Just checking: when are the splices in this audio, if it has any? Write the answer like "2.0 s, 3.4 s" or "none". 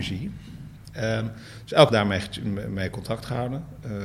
1.9 s